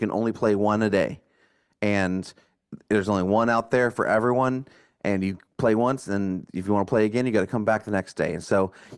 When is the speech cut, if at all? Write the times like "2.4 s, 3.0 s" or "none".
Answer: none